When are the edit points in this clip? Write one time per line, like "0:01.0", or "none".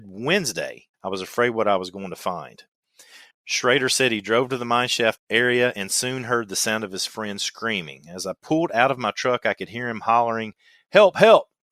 0:00.9
0:03.3
0:05.2